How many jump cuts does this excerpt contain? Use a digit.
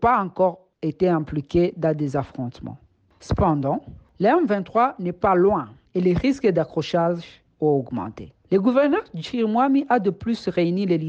0